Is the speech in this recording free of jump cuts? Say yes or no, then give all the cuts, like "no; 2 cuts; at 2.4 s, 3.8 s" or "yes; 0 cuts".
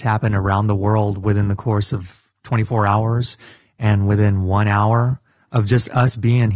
yes; 0 cuts